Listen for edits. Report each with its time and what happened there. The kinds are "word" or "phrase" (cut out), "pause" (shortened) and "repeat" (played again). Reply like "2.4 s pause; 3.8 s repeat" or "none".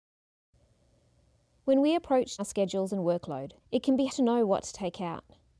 2.4 s word; 3.6 s pause; 4.1 s word